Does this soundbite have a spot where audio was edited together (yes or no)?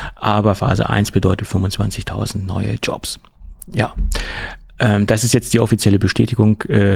no